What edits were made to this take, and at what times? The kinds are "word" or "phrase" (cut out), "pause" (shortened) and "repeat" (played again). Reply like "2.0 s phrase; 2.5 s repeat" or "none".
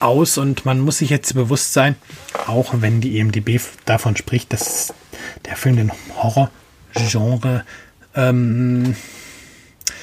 none

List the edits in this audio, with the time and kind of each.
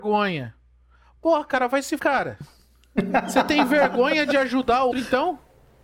2.0 s word; 4.9 s word

